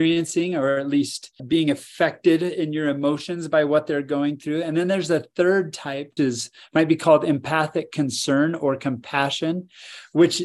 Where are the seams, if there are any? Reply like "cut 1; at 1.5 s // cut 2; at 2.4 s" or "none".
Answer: cut 1; at 1.4 s // cut 2; at 6.2 s

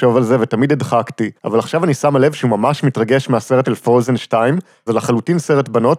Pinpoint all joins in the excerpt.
cut 1; at 1.4 s // cut 2; at 3.6 s // cut 3; at 4.9 s

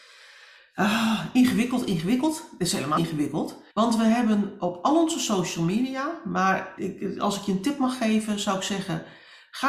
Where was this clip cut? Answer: cut 1; at 3.0 s // cut 2; at 3.7 s // cut 3; at 6.8 s

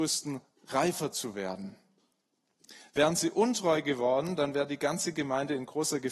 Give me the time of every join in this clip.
none

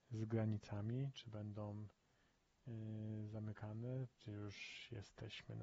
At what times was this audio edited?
cut 1; at 4.1 s

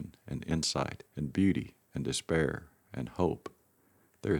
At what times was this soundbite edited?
cut 1; at 1.1 s

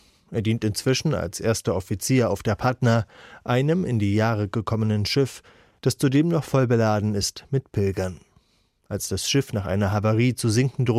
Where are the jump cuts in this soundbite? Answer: none

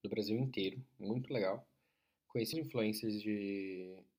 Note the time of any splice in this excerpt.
cut 1; at 1.3 s // cut 2; at 2.5 s

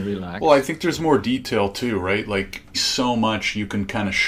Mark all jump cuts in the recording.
cut 1; at 2.7 s

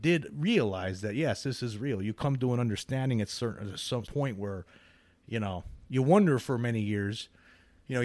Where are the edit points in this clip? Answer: cut 1; at 4.0 s

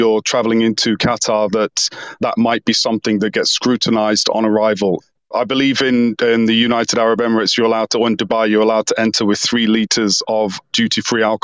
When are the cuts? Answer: none

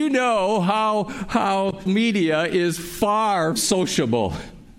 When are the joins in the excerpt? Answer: cut 1; at 1.9 s // cut 2; at 3.6 s

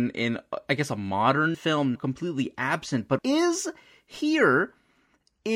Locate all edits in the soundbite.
cut 1; at 1.5 s // cut 2; at 2.0 s // cut 3; at 3.2 s

